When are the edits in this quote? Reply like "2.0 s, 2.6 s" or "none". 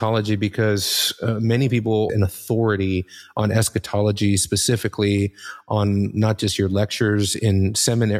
2.1 s